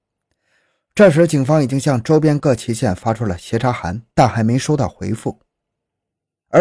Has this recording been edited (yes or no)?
no